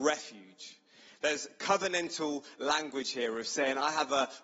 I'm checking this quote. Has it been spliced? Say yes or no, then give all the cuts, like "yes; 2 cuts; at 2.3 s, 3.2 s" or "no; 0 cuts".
no; 0 cuts